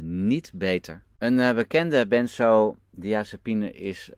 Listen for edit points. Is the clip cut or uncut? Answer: cut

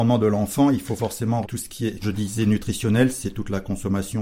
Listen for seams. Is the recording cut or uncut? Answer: cut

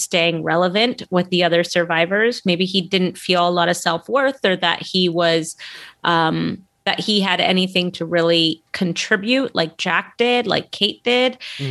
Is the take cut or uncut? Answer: cut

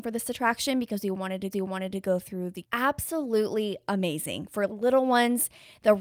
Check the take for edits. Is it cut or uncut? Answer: cut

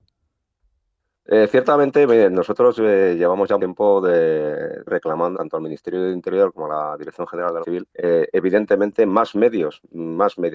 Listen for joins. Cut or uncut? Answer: cut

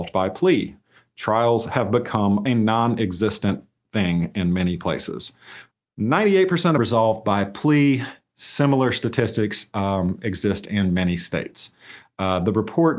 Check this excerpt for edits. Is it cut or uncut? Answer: cut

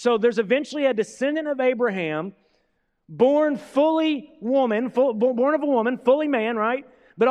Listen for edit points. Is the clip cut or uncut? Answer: uncut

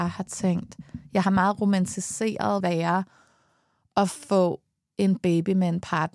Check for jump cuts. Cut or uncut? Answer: cut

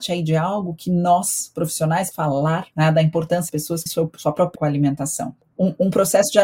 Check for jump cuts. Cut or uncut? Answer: cut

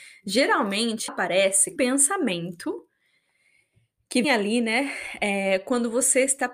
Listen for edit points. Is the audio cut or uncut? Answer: cut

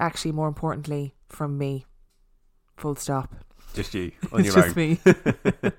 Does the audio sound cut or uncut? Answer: uncut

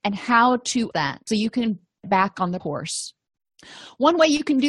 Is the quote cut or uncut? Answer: cut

